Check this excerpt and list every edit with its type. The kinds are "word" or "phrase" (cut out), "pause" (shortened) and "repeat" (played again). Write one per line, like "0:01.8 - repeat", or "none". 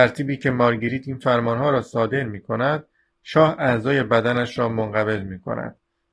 none